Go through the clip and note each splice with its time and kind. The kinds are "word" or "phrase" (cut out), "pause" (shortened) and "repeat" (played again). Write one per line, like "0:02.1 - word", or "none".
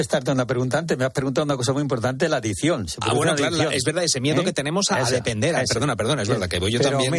none

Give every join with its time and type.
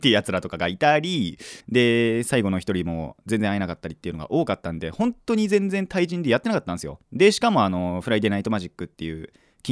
0:01.6 - pause
0:07.0 - pause

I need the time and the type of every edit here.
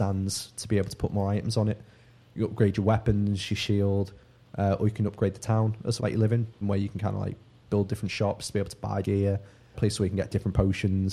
0:06.0 - word
0:06.6 - word
0:09.0 - word
0:09.7 - word

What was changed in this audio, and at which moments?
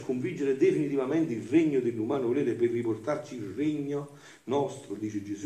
none

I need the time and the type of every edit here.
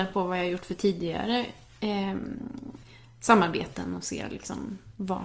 none

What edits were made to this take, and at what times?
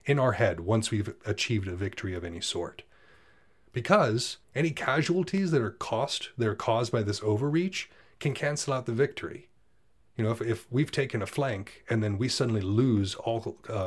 0:04.4 - pause

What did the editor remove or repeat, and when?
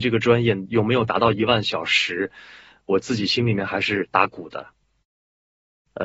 none

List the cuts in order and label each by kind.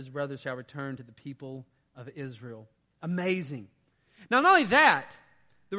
none

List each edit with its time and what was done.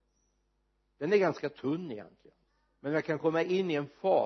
0:02.5 - pause

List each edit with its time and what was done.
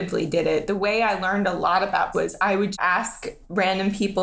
0:02.1 - word
0:02.7 - word

